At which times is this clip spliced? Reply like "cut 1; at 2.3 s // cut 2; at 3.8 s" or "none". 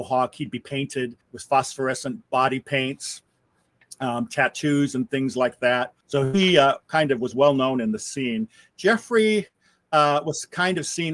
cut 1; at 1.2 s // cut 2; at 6.0 s